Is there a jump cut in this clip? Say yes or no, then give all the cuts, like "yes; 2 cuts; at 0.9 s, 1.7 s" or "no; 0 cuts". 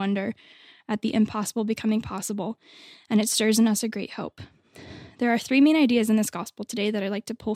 no; 0 cuts